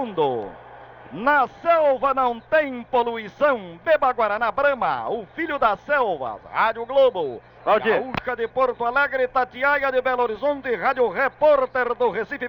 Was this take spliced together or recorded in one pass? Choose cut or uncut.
uncut